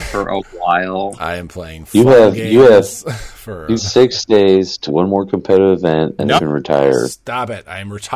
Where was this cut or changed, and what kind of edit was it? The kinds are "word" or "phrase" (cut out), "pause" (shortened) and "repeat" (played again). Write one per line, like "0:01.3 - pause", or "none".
0:03.8 - word
0:04.9 - word
0:06.4 - word